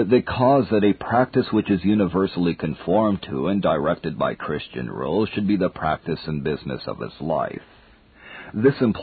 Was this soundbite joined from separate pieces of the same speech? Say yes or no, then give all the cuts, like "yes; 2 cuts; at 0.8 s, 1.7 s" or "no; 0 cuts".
no; 0 cuts